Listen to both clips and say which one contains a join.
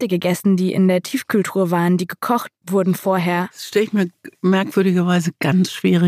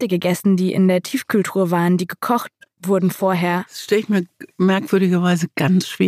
first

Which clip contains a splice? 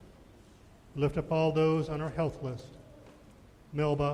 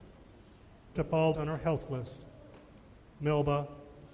second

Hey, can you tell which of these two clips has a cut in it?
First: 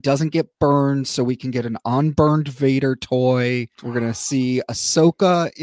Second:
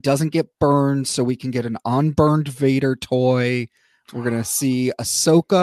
first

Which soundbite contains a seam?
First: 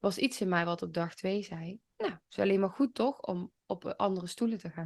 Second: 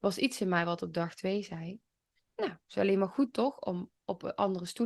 first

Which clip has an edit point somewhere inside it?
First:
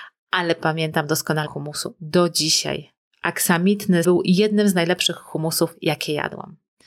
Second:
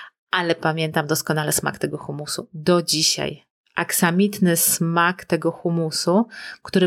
first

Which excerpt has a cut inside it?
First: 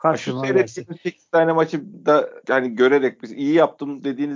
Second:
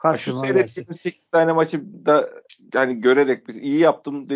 first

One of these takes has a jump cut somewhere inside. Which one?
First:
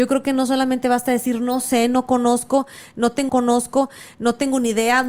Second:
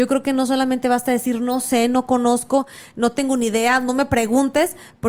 first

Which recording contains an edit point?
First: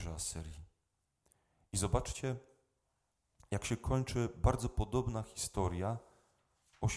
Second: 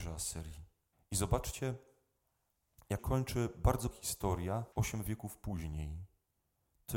second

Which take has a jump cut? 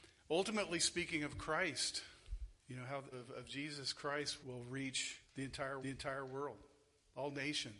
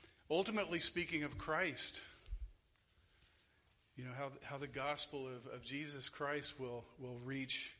first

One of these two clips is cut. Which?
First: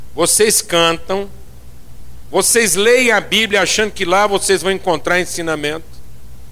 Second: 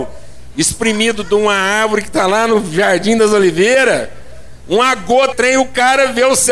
second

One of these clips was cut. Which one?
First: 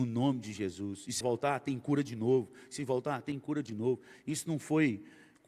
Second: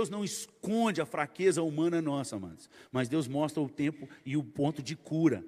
first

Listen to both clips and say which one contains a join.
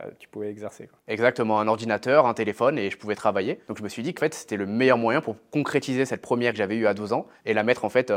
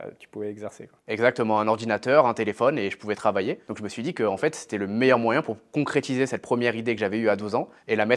first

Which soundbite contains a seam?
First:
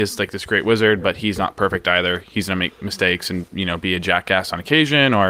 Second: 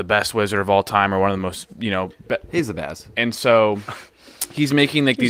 first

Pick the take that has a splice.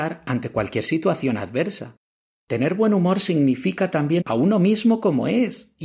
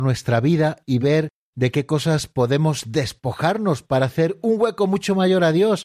first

